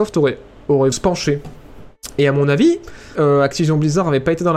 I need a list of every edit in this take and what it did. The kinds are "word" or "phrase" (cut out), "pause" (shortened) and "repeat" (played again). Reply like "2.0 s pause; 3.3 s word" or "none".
0.9 s word; 3.1 s word